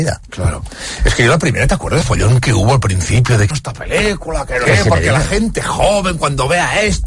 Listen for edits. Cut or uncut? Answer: cut